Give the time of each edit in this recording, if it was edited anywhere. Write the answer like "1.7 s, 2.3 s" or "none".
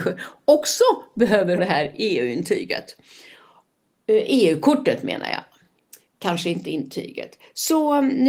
1.6 s